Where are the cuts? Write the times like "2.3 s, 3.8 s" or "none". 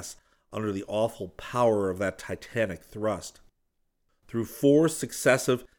none

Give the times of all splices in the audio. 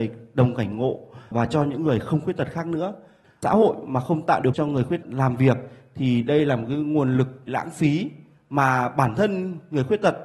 4.5 s, 5.0 s, 7.5 s

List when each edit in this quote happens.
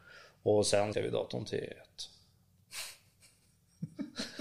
0.9 s

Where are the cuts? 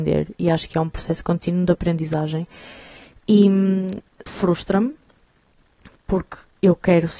4.3 s

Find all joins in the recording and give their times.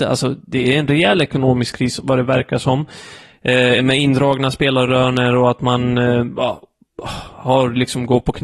none

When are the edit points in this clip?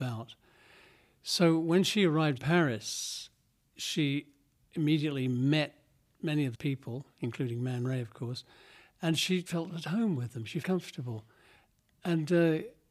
2.4 s, 6.5 s, 9.5 s, 10.6 s

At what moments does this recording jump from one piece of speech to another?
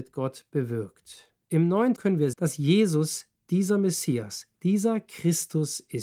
1.4 s, 2.0 s, 2.3 s

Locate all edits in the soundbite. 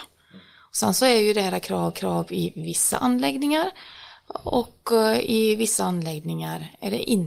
1.9 s

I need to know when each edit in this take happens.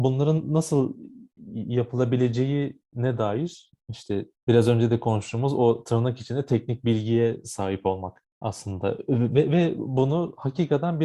8.3 s

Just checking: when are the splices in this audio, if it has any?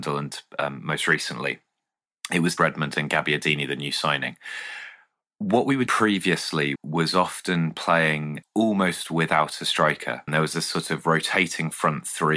2.6 s, 5.9 s, 6.8 s, 8.4 s, 10.3 s

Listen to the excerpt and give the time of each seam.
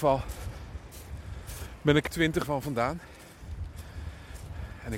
2.1 s, 2.4 s

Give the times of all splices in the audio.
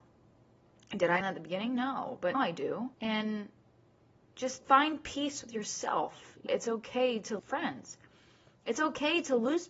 1.2 s, 2.3 s, 2.9 s, 4.6 s, 6.5 s, 7.4 s

